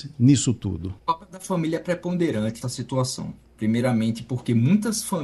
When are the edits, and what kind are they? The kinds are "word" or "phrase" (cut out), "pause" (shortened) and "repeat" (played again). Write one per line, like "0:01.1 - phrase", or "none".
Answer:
0:01.0 - pause
0:02.6 - word